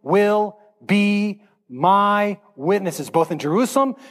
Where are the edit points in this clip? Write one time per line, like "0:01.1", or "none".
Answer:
none